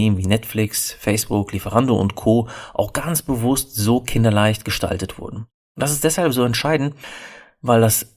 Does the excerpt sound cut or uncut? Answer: cut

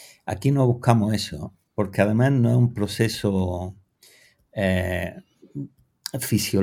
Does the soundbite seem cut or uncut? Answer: uncut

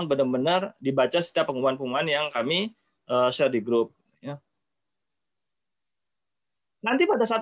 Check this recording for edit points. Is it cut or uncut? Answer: uncut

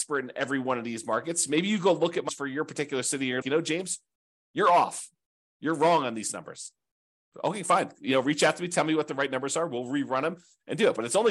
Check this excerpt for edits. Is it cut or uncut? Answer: cut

